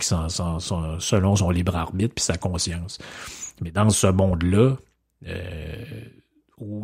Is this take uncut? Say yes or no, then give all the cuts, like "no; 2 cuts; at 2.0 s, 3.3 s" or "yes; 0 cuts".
yes; 0 cuts